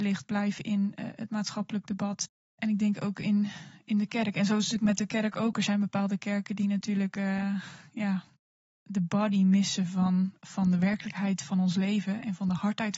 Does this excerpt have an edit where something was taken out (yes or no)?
no